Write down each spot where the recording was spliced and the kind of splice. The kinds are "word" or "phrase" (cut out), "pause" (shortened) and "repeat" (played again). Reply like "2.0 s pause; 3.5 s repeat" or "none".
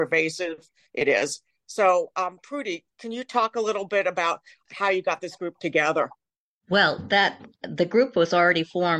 none